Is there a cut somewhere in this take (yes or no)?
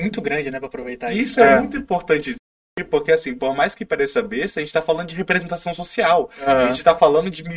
no